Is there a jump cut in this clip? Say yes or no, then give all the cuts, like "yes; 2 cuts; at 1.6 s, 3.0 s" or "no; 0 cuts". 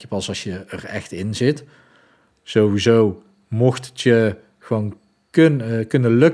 no; 0 cuts